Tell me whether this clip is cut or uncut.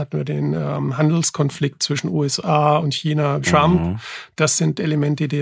cut